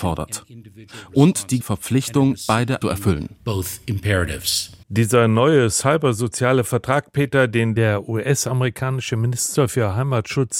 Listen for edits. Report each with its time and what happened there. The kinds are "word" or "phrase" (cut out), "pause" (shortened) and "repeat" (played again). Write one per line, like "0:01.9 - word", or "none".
0:01.6 - word
0:02.8 - phrase
0:04.8 - pause